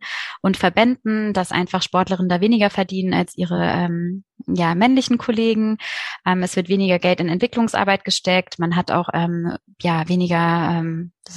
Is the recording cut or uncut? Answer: uncut